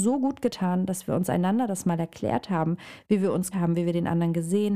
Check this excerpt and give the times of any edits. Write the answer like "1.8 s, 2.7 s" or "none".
3.5 s

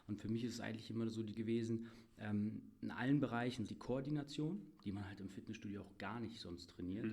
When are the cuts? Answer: 1.4 s, 3.7 s

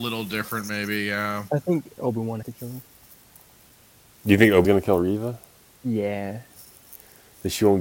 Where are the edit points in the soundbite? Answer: 2.0 s, 2.4 s, 4.6 s

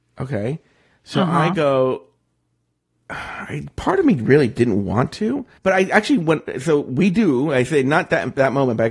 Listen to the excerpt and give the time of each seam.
5.6 s

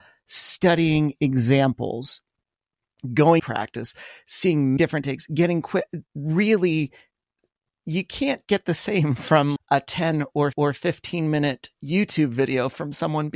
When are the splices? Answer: 3.4 s, 4.8 s, 6.0 s, 9.6 s, 10.5 s

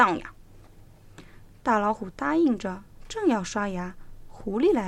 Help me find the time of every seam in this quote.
none

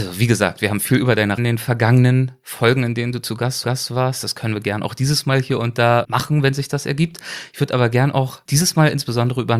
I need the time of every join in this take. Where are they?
1.4 s, 3.6 s, 6.0 s

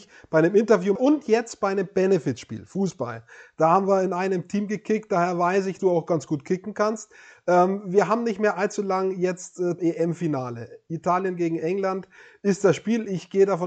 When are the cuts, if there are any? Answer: 1.0 s, 5.8 s, 9.8 s

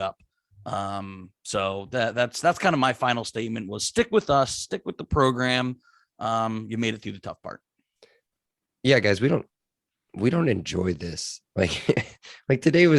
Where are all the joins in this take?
none

